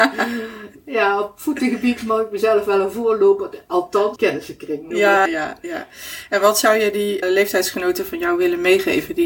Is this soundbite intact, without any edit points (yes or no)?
no